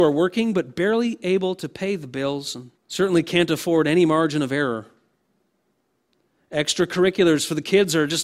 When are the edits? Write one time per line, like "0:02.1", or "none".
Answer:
0:02.8